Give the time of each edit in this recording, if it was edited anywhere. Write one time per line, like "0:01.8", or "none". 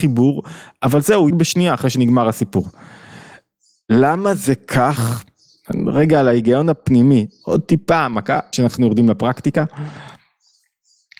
0:01.3
0:08.5